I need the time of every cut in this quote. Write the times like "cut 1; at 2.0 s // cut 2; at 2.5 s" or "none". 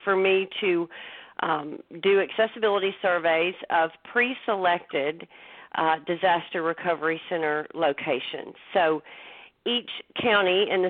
none